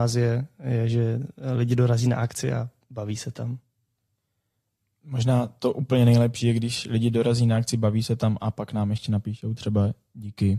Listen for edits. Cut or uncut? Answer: uncut